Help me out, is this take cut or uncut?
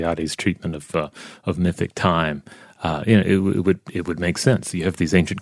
uncut